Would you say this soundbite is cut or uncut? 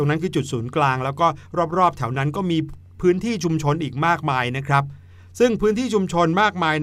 uncut